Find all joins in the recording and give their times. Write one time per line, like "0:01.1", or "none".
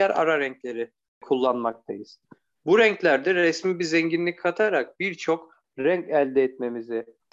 none